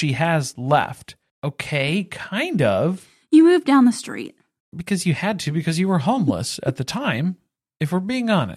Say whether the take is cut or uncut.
uncut